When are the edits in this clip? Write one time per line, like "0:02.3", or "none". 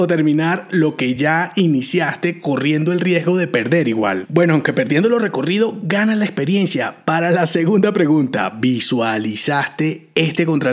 none